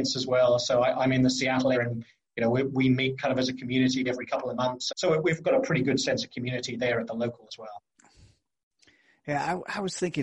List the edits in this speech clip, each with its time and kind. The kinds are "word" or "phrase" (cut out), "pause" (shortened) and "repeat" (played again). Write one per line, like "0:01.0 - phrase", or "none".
0:01.7 - word
0:04.1 - word
0:04.9 - word
0:05.4 - word
0:07.5 - word